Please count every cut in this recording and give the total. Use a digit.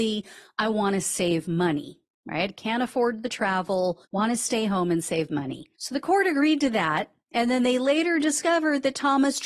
2